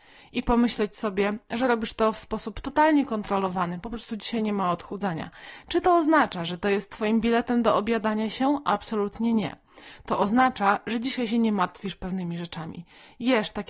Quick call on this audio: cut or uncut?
uncut